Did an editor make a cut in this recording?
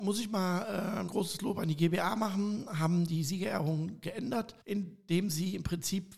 yes; 2 cuts; at 1.1 s, 4.6 s

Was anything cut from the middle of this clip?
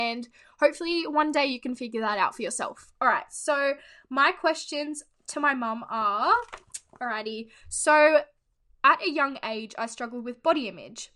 no; 0 cuts

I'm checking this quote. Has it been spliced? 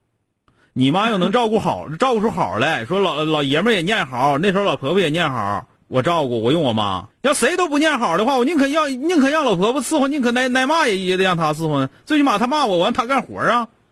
yes; 2 cuts; at 5.8 s, 7.1 s

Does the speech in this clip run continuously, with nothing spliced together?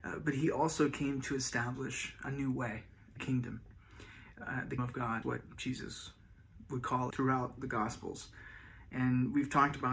no; 5 cuts; at 2.2 s, 3.2 s, 4.8 s, 5.2 s, 7.1 s

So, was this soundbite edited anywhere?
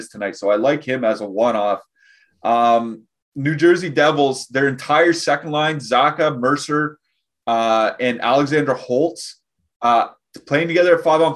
no; 0 cuts

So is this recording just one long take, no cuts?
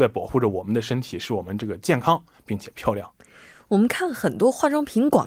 yes; 0 cuts

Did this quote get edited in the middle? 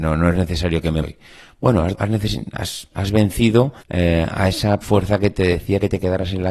yes; 5 cuts; at 1.0 s, 1.9 s, 2.9 s, 3.8 s, 4.8 s

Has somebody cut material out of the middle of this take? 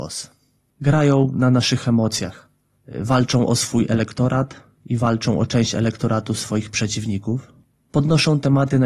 no; 0 cuts

